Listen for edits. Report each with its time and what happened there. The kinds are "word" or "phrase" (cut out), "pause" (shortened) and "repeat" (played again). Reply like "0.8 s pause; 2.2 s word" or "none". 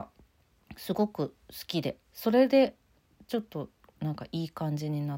2.0 s pause